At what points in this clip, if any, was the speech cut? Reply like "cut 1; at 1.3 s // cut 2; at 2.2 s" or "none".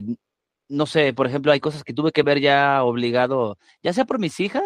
none

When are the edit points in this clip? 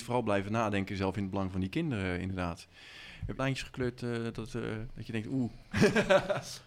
cut 1; at 3.4 s

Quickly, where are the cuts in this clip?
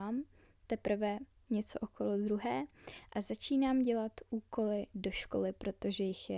none

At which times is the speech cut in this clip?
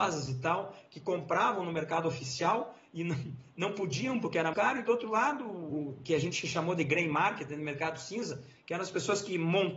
cut 1; at 4.5 s // cut 2; at 5.7 s

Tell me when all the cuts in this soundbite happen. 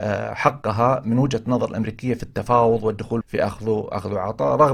cut 1; at 3.2 s

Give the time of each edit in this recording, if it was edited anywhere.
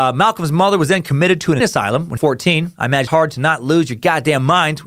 cut 1; at 1.6 s // cut 2; at 2.2 s // cut 3; at 3.1 s

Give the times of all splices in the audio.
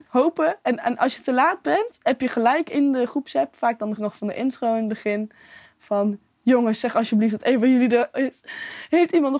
cut 1; at 4.0 s // cut 2; at 8.1 s

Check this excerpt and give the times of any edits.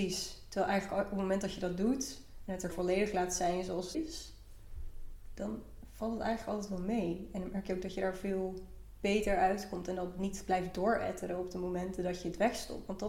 cut 1; at 2.7 s // cut 2; at 3.9 s

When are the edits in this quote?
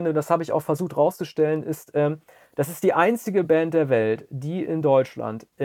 none

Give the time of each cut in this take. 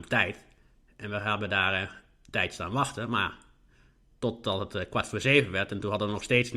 none

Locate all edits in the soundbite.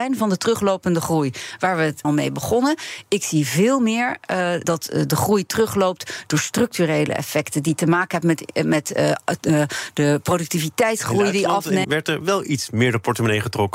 cut 1; at 2.0 s // cut 2; at 4.6 s // cut 3; at 11.8 s

